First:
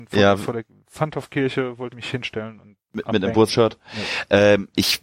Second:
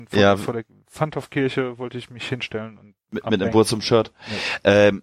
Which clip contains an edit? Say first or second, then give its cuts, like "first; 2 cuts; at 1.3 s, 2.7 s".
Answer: first; 2 cuts; at 1.9 s, 3.5 s